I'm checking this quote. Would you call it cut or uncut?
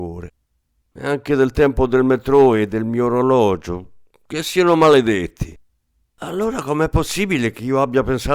uncut